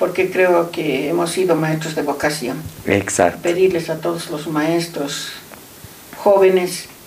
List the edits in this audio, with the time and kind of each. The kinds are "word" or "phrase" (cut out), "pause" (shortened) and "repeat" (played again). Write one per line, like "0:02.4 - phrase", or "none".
none